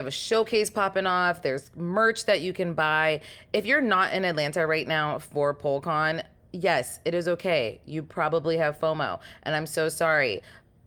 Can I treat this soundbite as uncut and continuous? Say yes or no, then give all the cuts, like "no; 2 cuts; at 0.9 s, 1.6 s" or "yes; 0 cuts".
yes; 0 cuts